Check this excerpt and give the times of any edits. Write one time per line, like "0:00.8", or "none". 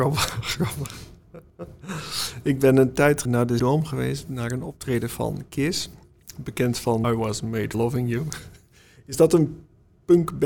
0:03.3
0:03.6
0:07.0
0:07.7